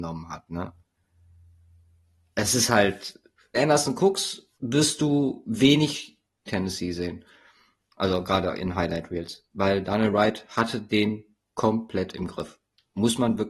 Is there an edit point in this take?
yes; 3 cuts; at 3.5 s, 4.5 s, 6.5 s

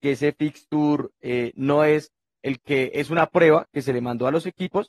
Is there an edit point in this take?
no; 0 cuts

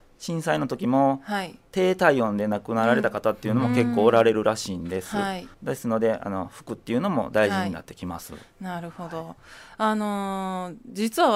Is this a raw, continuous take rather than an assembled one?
no; 2 cuts; at 1.7 s, 5.5 s

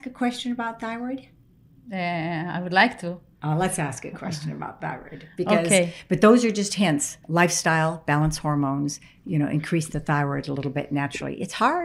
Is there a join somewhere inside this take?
yes; 1 cut; at 7.2 s

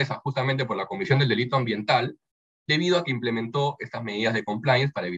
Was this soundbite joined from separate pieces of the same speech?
no; 0 cuts

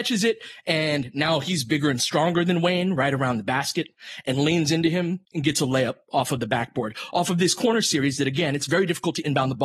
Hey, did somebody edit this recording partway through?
yes; 1 cut; at 5.2 s

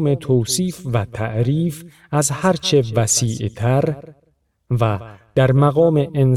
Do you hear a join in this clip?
no; 0 cuts

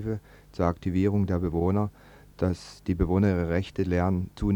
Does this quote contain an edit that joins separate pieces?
no; 0 cuts

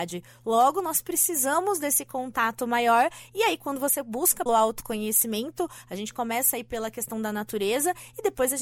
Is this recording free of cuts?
no; 1 cut; at 4.5 s

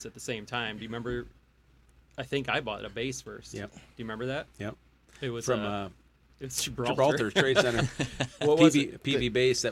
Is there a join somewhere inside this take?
no; 0 cuts

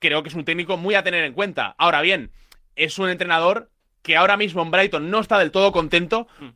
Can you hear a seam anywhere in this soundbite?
no; 0 cuts

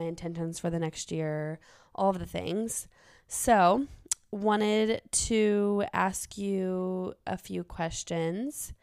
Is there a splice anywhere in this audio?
no; 0 cuts

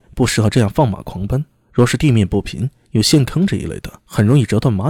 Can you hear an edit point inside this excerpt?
yes; 1 cut; at 4.0 s

